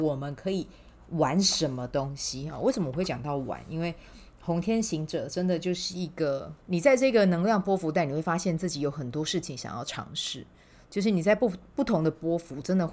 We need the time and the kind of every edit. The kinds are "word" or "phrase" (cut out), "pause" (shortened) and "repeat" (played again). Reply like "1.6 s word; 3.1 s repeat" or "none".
6.6 s pause